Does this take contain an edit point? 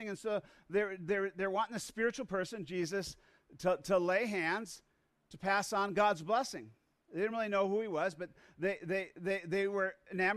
no; 0 cuts

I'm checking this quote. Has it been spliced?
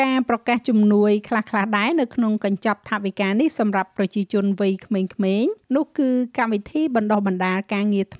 yes; 1 cut; at 5.6 s

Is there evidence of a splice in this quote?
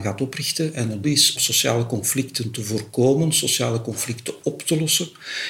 yes; 2 cuts; at 1.0 s, 1.4 s

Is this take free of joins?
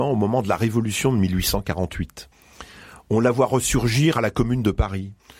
yes; 0 cuts

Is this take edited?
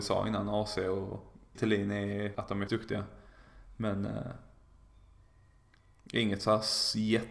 yes; 3 cuts; at 1.6 s, 2.4 s, 2.7 s

